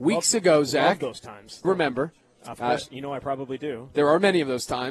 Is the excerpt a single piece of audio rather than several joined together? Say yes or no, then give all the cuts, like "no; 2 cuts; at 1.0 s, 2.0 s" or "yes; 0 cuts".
no; 1 cut; at 1.6 s